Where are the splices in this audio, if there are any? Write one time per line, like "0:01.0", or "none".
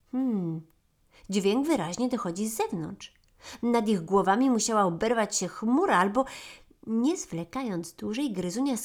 none